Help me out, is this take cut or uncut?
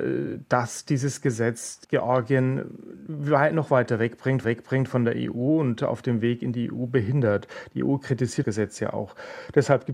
cut